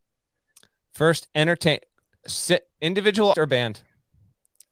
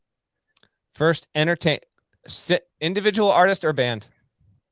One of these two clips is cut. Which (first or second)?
first